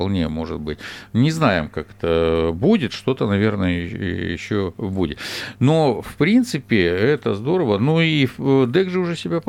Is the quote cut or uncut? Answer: uncut